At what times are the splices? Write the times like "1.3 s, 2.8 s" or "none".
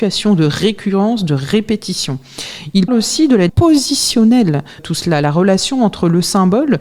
2.9 s, 3.5 s, 4.8 s